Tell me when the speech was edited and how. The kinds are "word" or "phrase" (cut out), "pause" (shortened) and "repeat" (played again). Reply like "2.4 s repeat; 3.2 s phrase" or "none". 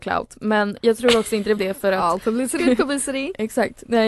1.6 s word; 2.6 s word